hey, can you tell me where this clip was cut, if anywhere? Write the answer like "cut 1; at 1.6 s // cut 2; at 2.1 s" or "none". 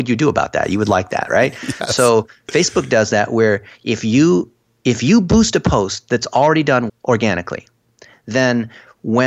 cut 1; at 6.9 s